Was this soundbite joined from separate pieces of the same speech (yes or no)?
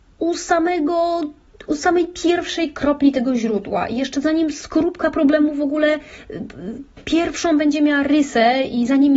no